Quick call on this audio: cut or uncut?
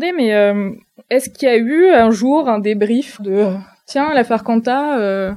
cut